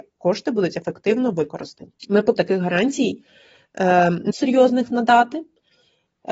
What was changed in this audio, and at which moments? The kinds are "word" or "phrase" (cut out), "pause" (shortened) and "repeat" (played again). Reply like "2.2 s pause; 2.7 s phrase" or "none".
2.0 s pause; 2.4 s word; 4.3 s word